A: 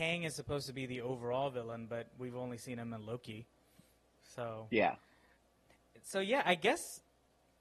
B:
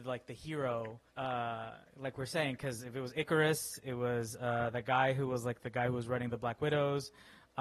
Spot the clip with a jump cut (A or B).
B